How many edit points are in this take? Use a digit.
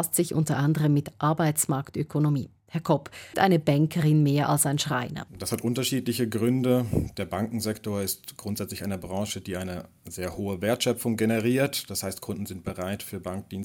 2